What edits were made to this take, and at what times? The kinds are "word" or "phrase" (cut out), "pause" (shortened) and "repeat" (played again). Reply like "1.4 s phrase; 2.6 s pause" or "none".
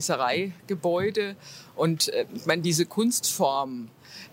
none

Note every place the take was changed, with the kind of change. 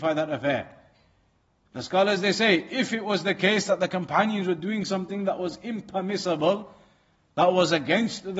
none

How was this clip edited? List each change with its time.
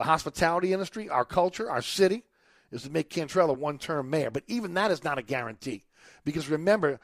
none

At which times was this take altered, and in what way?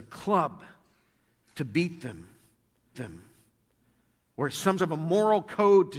2.9 s repeat; 4.8 s word

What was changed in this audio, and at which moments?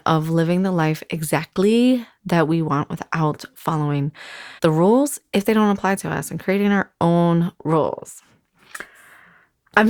4.6 s pause

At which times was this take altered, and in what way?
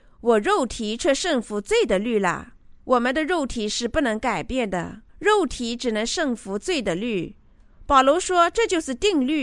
2.8 s pause; 5.1 s pause

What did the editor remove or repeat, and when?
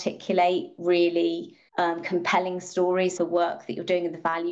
1.7 s pause; 3.2 s word

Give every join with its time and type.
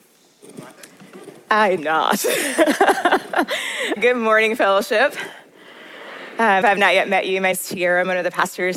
1.8 s word; 4.0 s word; 6.6 s word; 7.5 s word

